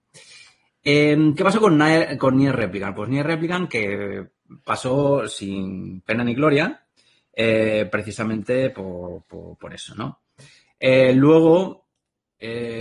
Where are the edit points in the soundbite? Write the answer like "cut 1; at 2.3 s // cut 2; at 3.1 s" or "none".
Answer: none